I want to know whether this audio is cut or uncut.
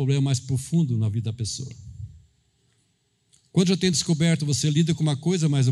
uncut